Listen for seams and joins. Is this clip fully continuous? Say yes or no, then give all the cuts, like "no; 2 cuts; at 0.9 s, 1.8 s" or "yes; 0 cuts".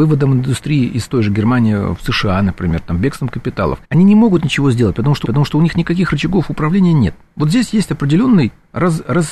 no; 2 cuts; at 3.8 s, 5.2 s